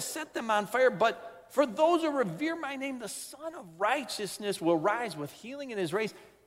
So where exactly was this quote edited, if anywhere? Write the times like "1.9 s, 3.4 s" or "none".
none